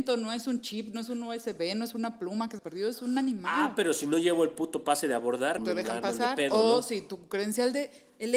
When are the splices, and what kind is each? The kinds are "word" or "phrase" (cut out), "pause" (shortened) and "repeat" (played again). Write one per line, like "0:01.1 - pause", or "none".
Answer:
0:02.6 - word
0:05.6 - word